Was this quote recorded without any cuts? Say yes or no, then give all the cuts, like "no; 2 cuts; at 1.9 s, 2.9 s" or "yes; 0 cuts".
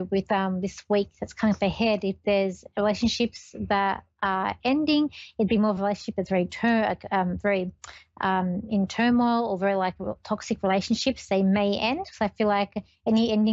yes; 0 cuts